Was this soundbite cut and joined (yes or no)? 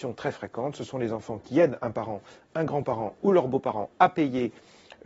no